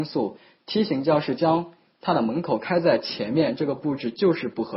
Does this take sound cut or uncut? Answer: uncut